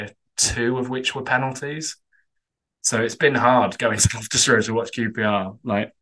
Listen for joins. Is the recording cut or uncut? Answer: uncut